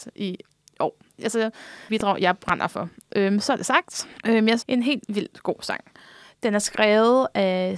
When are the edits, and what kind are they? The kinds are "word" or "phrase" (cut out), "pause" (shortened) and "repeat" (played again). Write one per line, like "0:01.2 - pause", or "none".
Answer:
0:01.9 - phrase
0:04.2 - pause
0:04.6 - phrase